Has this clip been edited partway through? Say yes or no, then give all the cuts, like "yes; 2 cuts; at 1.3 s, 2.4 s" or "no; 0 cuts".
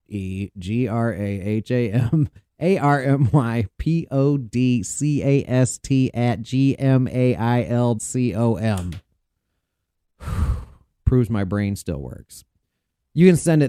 yes; 1 cut; at 8.0 s